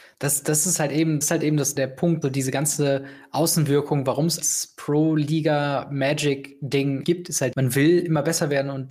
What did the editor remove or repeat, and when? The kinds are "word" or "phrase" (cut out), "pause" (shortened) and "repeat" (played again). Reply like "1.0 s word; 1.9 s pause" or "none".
1.2 s word; 1.8 s word; 2.2 s word; 4.4 s word; 7.0 s word; 7.5 s word

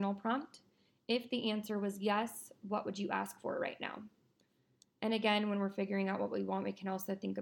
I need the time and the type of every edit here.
none

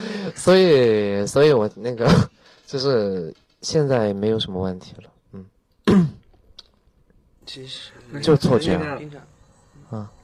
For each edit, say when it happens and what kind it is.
none

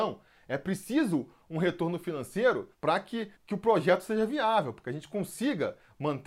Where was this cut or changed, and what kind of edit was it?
2.7 s pause; 3.4 s pause

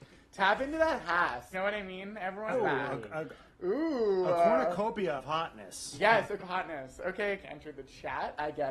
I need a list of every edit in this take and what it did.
1.5 s word; 2.5 s word; 5.2 s word; 6.4 s word; 7.4 s phrase

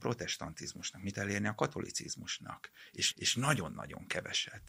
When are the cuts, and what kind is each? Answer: 1.1 s word; 3.1 s repeat

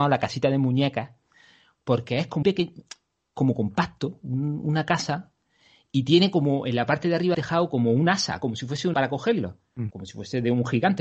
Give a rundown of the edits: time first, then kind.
2.4 s word; 7.3 s word; 8.9 s word; 9.9 s word

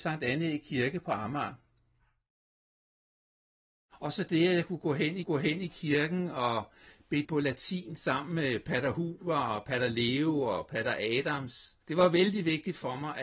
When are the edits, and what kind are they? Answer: 5.2 s repeat; 7.2 s word; 11.8 s pause

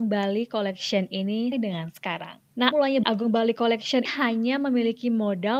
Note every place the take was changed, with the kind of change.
1.5 s word; 2.7 s word; 3.0 s word; 4.0 s word

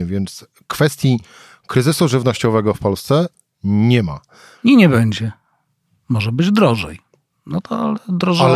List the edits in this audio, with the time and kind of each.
none

